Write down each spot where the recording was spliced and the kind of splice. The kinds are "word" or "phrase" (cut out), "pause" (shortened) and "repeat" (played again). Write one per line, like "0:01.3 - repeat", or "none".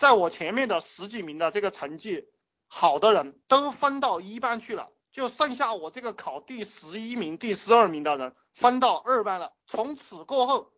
0:03.4 - pause
0:05.0 - pause
0:09.6 - pause